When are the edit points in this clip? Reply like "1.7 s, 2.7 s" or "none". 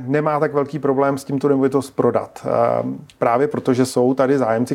none